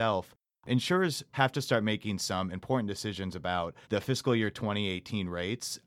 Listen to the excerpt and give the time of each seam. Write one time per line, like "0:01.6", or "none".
0:01.3
0:03.8